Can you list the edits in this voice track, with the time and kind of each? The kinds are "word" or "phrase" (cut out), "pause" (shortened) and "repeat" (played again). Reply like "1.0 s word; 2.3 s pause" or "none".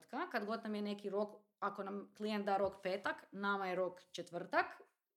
none